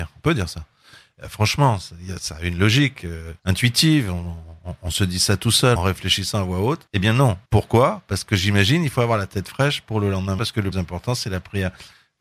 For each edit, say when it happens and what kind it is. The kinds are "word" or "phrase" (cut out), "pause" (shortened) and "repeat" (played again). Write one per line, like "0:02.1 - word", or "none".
0:02.2 - word
0:03.4 - pause
0:05.8 - phrase
0:06.9 - pause
0:07.5 - pause
0:10.4 - word
0:10.7 - word